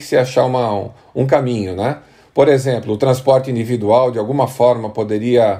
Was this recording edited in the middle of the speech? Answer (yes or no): no